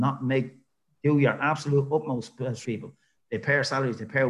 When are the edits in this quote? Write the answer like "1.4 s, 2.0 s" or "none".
2.6 s